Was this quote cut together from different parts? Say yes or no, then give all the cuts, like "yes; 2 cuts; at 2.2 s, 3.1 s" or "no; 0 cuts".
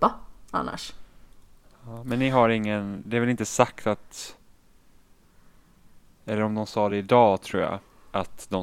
no; 0 cuts